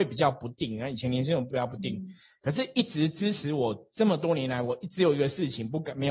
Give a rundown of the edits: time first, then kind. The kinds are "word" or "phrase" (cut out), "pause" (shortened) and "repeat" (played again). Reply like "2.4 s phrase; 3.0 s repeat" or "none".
none